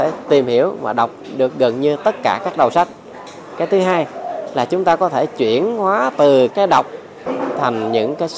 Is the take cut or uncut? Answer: cut